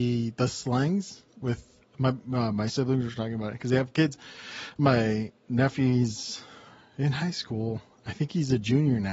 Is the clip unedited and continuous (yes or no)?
yes